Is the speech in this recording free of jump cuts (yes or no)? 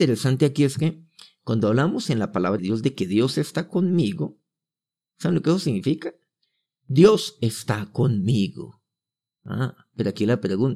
no